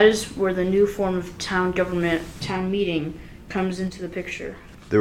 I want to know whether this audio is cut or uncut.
cut